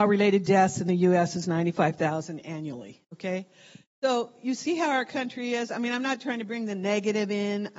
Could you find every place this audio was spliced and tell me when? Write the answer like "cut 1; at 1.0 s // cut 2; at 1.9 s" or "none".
cut 1; at 3.0 s